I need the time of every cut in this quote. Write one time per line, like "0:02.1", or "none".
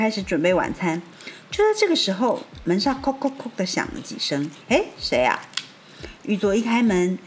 0:04.6